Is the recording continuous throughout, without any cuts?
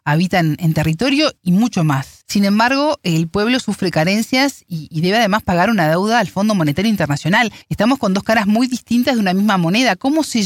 no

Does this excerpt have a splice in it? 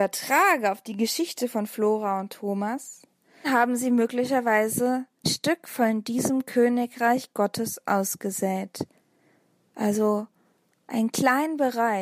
yes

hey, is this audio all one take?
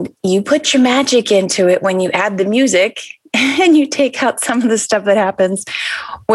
yes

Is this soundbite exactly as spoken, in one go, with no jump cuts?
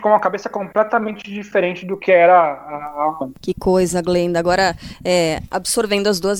no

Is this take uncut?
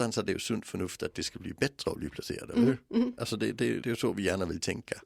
no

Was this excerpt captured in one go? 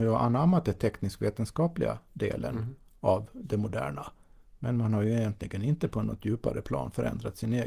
yes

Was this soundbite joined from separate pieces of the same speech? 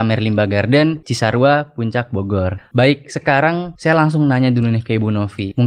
no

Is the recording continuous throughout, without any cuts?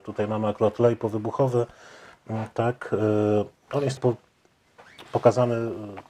no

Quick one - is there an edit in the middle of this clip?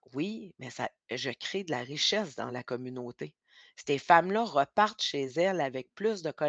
no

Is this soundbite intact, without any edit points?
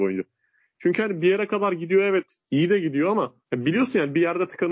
no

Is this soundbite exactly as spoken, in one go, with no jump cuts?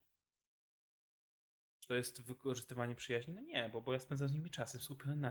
yes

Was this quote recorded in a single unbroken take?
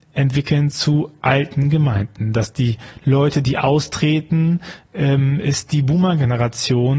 yes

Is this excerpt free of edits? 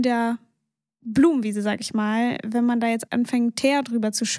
no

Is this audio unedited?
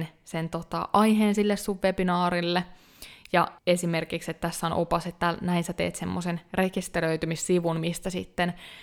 no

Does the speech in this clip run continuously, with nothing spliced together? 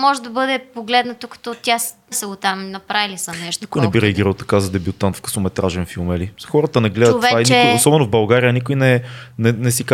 no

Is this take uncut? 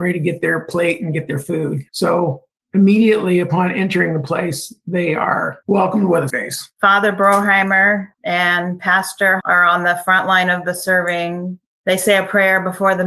no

